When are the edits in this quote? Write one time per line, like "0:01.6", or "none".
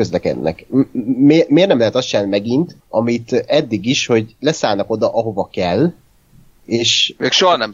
0:02.8